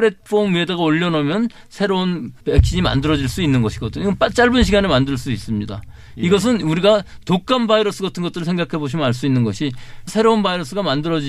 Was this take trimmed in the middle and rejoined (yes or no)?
yes